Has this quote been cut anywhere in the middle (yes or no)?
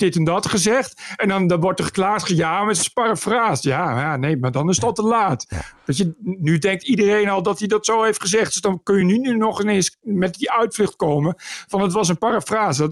no